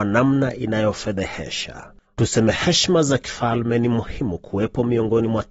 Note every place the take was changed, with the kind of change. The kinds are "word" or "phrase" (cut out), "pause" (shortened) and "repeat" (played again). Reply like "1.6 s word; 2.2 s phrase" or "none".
2.0 s pause